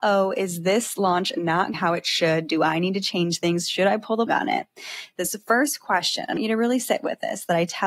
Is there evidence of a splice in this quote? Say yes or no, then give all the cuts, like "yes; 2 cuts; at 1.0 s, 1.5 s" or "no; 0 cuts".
yes; 3 cuts; at 1.7 s, 4.3 s, 6.4 s